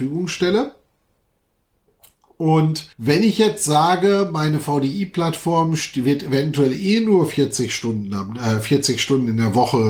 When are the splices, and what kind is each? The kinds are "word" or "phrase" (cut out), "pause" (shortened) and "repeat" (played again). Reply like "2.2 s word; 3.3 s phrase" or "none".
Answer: 2.9 s pause